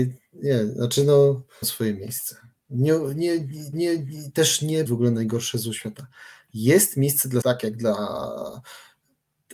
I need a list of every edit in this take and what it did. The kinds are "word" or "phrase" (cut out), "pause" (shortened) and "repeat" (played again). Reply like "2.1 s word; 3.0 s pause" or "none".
1.6 s phrase; 3.7 s repeat; 4.9 s phrase; 7.4 s word